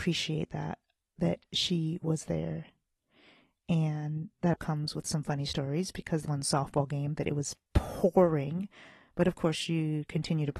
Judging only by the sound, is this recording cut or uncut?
cut